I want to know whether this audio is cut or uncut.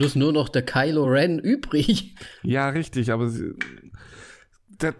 uncut